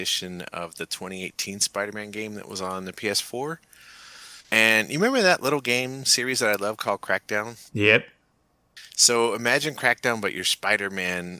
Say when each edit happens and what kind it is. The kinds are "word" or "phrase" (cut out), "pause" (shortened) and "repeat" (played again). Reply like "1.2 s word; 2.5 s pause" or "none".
4.4 s pause; 7.7 s pause